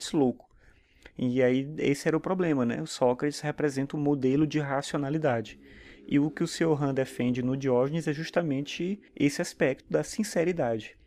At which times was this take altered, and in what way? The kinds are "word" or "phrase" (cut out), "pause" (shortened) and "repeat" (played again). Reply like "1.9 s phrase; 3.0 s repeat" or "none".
9.1 s pause